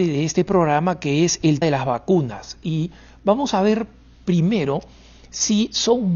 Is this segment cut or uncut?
cut